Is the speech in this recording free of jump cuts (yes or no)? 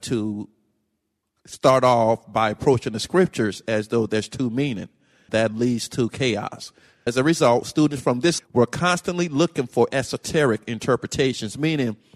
no